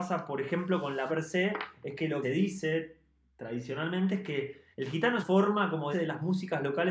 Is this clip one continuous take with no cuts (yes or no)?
no